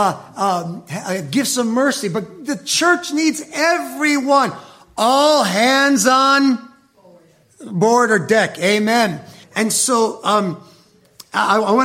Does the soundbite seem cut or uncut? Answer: cut